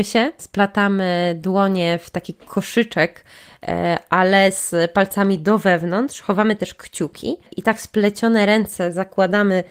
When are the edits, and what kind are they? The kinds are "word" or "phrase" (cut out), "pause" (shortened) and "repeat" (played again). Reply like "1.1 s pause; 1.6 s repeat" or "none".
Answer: none